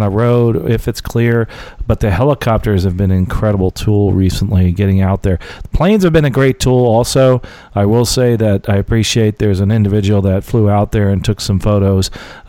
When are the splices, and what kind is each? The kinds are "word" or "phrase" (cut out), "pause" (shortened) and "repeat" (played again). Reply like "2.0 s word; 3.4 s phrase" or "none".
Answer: none